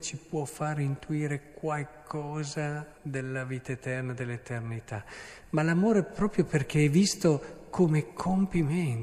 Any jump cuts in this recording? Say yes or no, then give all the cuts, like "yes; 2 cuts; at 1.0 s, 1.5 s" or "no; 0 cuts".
yes; 1 cut; at 3.0 s